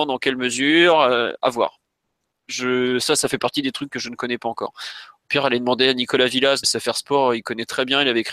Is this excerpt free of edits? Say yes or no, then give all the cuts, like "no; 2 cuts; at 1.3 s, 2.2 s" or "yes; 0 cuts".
no; 1 cut; at 6.6 s